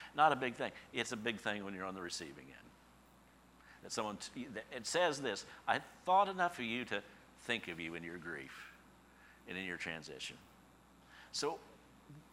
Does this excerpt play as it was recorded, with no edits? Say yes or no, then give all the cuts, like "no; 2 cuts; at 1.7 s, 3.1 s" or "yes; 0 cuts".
yes; 0 cuts